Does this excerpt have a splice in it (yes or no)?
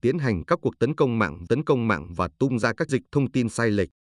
yes